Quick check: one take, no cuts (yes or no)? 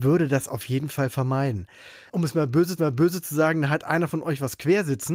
no